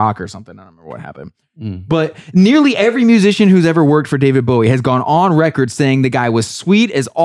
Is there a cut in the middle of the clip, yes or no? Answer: no